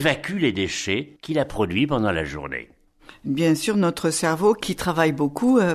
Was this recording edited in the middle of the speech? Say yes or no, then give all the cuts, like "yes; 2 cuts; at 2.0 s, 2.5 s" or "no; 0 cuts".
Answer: yes; 1 cut; at 1.2 s